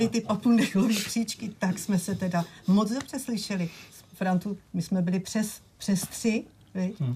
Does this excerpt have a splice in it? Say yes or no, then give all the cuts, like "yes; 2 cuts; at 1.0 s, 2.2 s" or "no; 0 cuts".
yes; 1 cut; at 5.7 s